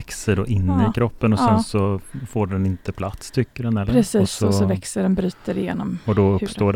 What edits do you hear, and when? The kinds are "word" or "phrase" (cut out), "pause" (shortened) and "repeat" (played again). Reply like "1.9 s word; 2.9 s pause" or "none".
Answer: none